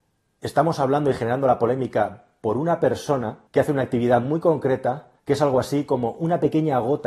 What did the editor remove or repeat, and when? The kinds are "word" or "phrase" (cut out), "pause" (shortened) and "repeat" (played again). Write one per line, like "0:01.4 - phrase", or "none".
0:03.5 - pause
0:05.2 - pause

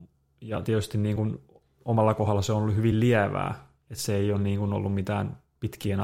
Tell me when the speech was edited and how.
none

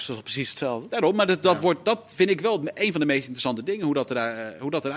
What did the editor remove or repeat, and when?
none

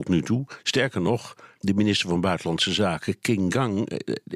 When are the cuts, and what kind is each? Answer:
0:01.6 - word

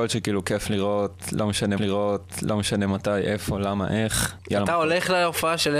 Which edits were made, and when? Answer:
0:01.8 - repeat

